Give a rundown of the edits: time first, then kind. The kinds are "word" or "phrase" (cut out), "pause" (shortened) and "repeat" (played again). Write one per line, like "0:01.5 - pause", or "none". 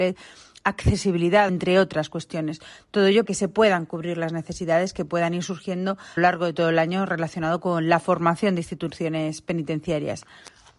0:01.5 - phrase
0:03.3 - word
0:06.2 - phrase